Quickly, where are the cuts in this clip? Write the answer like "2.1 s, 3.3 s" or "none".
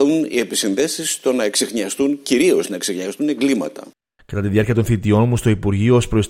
none